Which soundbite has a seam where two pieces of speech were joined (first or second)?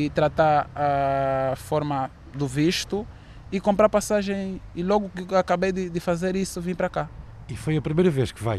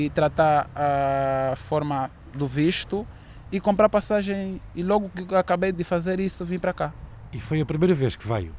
second